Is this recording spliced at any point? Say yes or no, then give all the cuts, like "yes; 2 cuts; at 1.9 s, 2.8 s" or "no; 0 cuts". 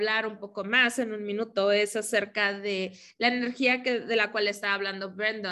no; 0 cuts